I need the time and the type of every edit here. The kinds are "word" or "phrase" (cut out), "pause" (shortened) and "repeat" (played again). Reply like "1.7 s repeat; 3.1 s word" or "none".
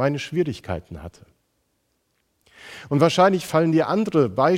3.5 s word